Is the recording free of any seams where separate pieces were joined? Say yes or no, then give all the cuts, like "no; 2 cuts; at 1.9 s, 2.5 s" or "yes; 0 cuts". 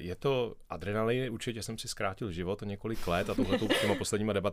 yes; 0 cuts